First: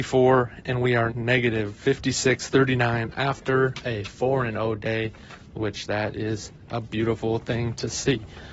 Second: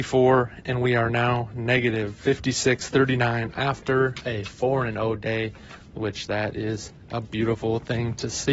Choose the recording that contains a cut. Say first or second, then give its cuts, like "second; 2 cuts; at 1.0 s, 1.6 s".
first; 1 cut; at 1.1 s